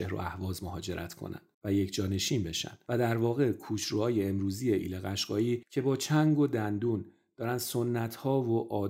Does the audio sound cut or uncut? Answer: cut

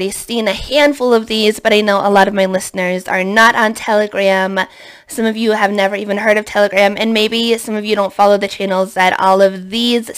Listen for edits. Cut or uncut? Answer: uncut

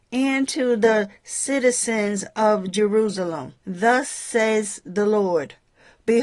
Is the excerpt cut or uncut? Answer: cut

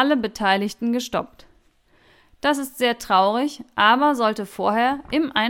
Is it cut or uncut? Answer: uncut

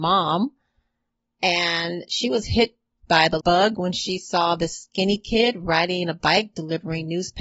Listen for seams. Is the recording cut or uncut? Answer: cut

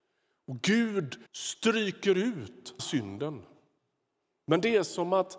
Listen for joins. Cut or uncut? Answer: cut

